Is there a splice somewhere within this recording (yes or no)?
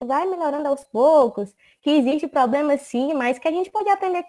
no